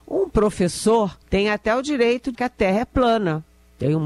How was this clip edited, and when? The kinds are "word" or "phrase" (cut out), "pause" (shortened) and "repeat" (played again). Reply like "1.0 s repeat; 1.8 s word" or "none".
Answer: 1.2 s pause; 2.3 s word